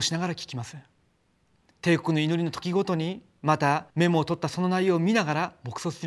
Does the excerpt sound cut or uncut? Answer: cut